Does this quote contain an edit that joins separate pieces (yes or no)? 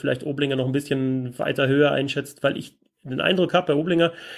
no